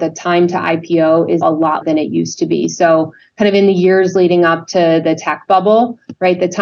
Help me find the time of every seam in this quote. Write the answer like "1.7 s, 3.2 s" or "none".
1.4 s, 1.8 s